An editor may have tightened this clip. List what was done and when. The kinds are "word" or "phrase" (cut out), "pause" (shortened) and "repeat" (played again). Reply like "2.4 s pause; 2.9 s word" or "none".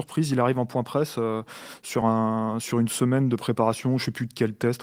none